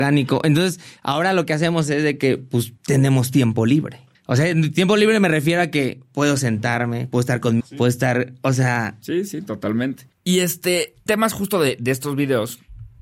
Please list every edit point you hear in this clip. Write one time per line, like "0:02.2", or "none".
0:02.8
0:04.1
0:07.6
0:10.1
0:11.1